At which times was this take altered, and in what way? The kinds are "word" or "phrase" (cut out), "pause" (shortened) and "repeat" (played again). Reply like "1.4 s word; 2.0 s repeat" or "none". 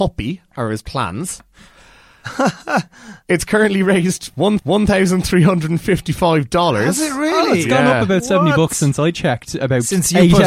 4.6 s repeat